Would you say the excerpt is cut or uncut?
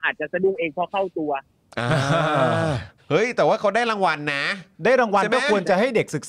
cut